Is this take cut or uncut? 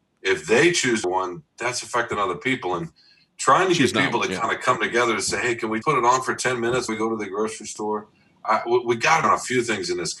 cut